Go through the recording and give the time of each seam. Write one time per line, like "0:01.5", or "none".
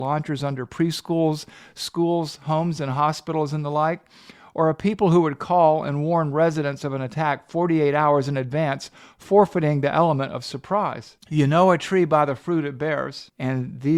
none